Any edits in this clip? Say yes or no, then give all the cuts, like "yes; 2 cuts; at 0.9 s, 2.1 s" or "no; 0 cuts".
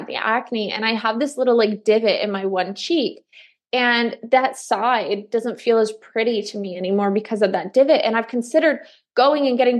no; 0 cuts